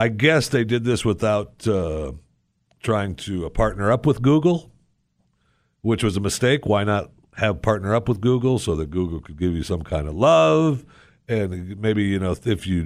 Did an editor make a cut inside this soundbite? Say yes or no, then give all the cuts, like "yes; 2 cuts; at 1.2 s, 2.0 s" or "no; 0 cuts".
no; 0 cuts